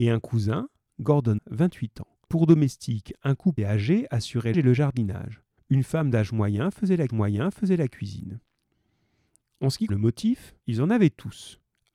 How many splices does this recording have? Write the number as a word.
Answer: eight